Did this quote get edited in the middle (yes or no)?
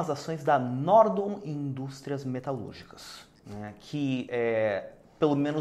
no